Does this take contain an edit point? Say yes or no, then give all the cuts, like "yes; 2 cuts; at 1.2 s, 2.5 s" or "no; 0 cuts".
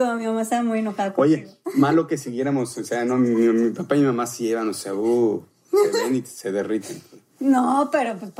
no; 0 cuts